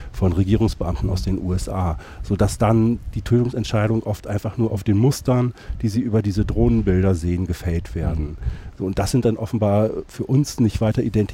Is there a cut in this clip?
no; 0 cuts

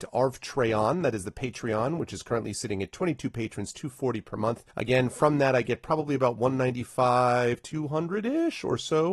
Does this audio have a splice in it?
yes; 1 cut; at 4.7 s

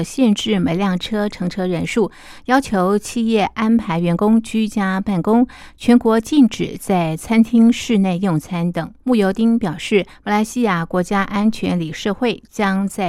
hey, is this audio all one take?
no; 1 cut; at 9.0 s

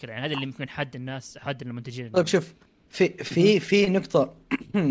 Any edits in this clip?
no; 0 cuts

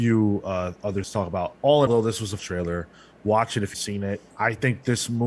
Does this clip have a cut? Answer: yes; 5 cuts; at 1.0 s, 1.9 s, 2.4 s, 3.7 s, 4.3 s

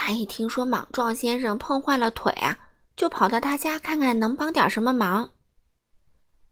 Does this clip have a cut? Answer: no; 0 cuts

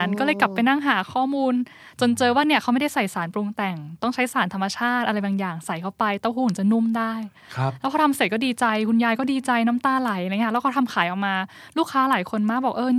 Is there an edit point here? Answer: no; 0 cuts

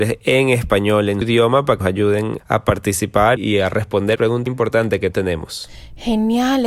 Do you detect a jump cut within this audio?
yes; 7 cuts; at 1.2 s, 1.8 s, 2.4 s, 3.4 s, 4.2 s, 4.5 s, 5.1 s

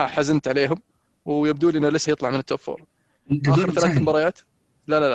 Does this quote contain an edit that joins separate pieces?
yes; 1 cut; at 2.1 s

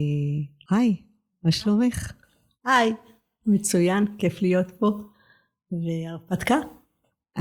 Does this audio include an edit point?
no; 0 cuts

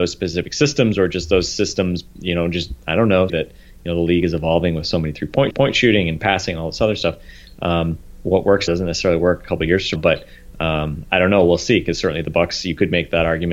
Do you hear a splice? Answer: yes; 5 cuts; at 2.1 s, 3.3 s, 5.5 s, 8.7 s, 10.0 s

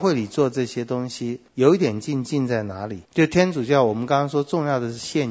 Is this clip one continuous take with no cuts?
no; 2 cuts; at 1.5 s, 3.0 s

